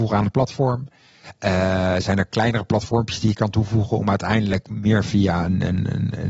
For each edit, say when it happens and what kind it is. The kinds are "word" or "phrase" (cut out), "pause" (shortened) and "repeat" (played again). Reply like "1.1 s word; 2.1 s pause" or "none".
none